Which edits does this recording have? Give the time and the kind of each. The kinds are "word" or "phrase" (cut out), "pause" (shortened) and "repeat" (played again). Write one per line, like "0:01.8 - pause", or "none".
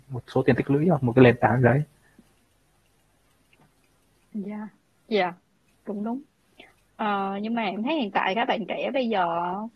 none